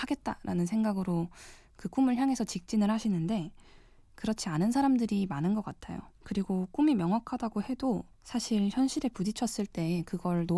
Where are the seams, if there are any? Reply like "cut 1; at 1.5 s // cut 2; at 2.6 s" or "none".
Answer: cut 1; at 6.1 s // cut 2; at 8.1 s